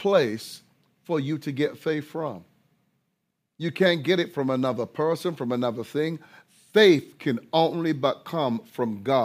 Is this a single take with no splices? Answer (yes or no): yes